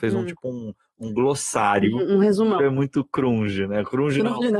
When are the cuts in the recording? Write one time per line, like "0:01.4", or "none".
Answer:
0:02.6